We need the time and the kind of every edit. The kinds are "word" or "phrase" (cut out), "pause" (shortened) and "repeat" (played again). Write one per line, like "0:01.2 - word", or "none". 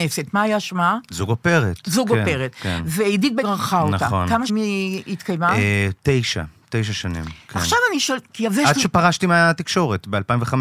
0:03.4 - word
0:04.5 - word